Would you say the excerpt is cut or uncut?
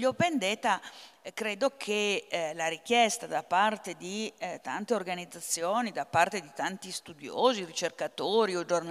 uncut